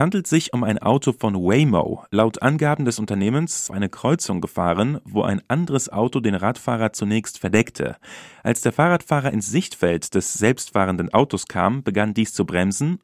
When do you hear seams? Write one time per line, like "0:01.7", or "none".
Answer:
0:03.7

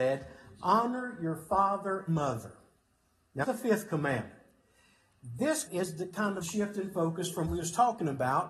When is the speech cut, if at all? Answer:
0:02.1
0:03.4
0:05.7
0:06.4
0:07.4

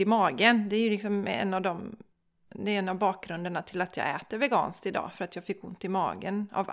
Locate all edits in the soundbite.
none

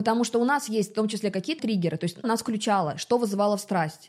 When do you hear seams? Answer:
0:01.6
0:02.2

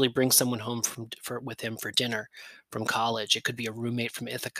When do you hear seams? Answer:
none

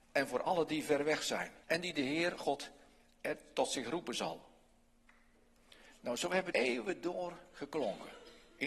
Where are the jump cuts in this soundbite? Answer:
0:01.6
0:02.4
0:06.5

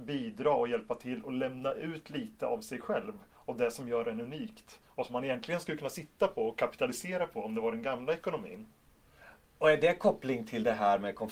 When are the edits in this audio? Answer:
none

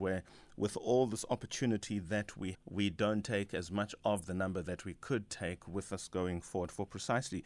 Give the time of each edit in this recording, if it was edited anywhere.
0:02.5

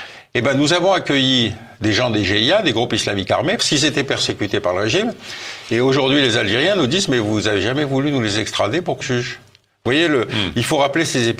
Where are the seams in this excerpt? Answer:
0:03.6
0:09.0

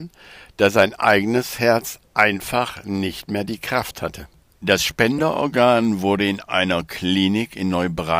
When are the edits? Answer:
0:04.4

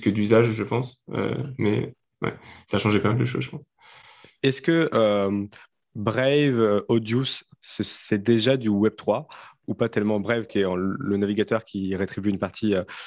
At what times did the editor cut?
0:09.5

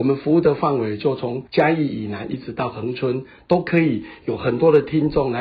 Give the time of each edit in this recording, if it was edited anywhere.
0:01.5

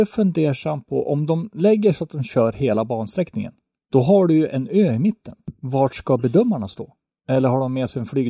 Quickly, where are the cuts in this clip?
none

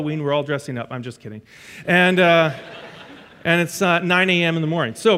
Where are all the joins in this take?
none

